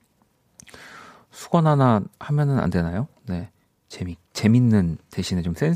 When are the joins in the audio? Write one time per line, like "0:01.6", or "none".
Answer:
none